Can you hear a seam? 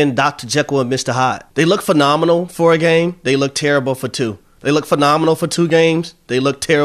yes; 1 cut; at 1.5 s

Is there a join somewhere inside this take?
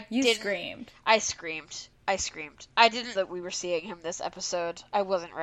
yes; 1 cut; at 3.2 s

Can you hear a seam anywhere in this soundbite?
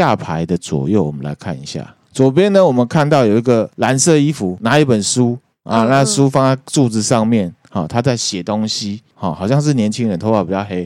no; 0 cuts

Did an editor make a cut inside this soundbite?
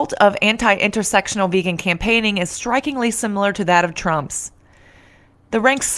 no; 0 cuts

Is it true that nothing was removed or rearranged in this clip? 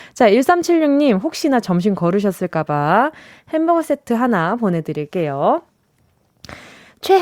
yes; 0 cuts

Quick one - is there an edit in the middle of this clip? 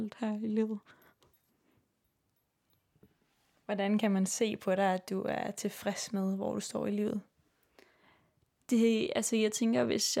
no; 0 cuts

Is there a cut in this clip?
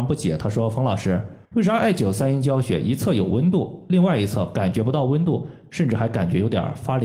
yes; 1 cut; at 1.4 s

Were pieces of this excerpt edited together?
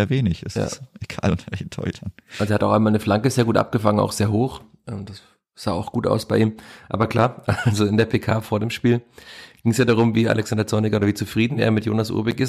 no; 0 cuts

